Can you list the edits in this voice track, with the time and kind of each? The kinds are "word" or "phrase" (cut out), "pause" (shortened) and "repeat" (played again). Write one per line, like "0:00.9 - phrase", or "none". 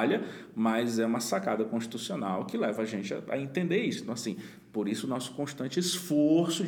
none

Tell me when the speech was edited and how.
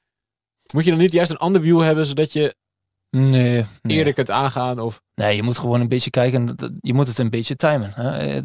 0:03.8 - pause
0:05.1 - pause

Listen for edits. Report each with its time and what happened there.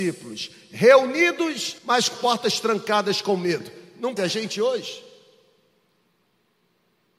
0:01.8 - pause
0:02.1 - word
0:04.2 - word

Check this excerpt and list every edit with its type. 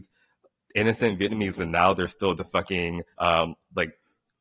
0:01.6 - word
0:02.3 - phrase
0:03.1 - pause

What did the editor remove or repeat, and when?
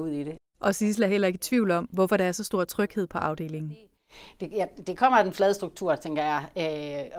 none

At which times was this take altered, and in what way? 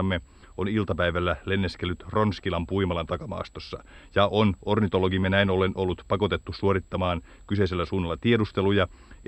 none

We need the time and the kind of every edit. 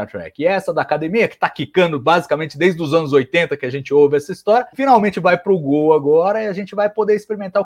0:04.7 - pause

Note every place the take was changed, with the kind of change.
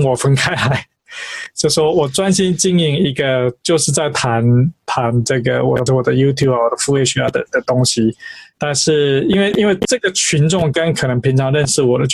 0:05.9 - word
0:08.5 - pause

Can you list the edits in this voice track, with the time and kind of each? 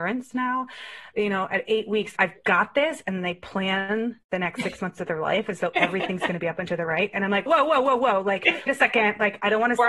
0:02.2 - word
0:07.5 - word
0:08.7 - word

